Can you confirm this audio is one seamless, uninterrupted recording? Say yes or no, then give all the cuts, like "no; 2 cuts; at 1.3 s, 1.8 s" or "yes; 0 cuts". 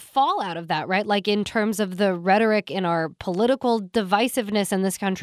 yes; 0 cuts